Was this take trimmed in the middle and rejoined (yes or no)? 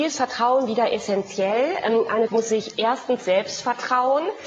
yes